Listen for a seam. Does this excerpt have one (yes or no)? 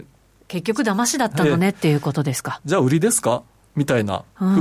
no